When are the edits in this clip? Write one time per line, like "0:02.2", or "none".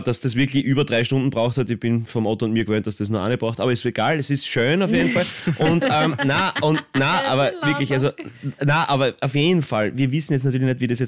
none